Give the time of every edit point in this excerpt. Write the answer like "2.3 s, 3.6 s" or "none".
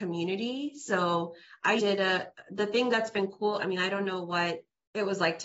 1.8 s